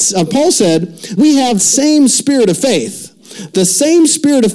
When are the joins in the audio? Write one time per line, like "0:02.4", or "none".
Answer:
0:01.2
0:01.6